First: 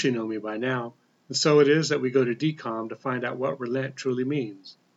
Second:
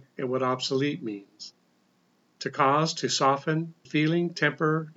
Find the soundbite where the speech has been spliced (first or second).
second